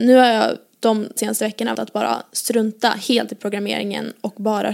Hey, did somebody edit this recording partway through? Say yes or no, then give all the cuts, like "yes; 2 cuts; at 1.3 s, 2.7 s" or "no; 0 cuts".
yes; 2 cuts; at 1.2 s, 1.7 s